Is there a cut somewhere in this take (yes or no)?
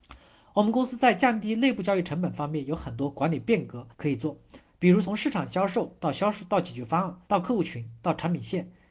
yes